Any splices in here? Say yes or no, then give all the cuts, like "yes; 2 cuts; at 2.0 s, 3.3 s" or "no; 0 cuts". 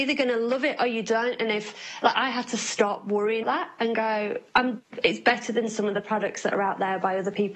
yes; 2 cuts; at 2.1 s, 3.4 s